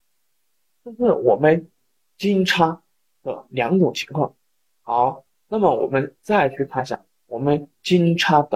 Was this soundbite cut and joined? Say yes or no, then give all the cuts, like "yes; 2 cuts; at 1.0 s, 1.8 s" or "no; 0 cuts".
no; 0 cuts